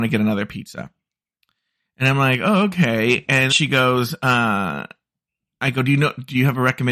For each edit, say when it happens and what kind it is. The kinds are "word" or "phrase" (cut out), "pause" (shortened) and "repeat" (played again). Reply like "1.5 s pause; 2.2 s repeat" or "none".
3.5 s word